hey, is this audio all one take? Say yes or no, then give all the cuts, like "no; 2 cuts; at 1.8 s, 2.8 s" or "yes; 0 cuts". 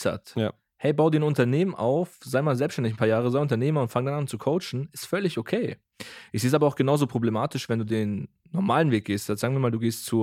yes; 0 cuts